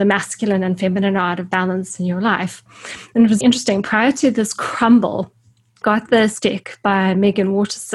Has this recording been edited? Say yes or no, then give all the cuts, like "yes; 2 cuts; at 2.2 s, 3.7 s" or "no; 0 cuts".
yes; 3 cuts; at 3.4 s, 5.8 s, 6.4 s